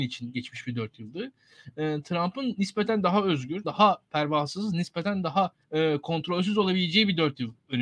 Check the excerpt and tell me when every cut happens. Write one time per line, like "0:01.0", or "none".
0:03.6
0:05.6